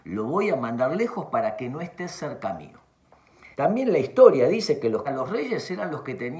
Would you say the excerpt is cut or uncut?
cut